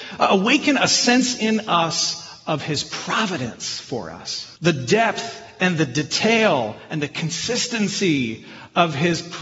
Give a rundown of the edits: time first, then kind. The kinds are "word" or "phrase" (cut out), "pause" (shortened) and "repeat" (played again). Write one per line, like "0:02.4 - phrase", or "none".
0:04.6 - pause